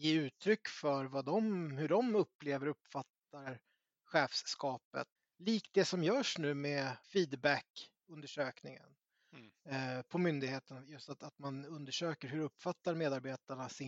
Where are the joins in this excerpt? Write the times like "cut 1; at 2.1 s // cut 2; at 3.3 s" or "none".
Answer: cut 1; at 5.2 s // cut 2; at 7.0 s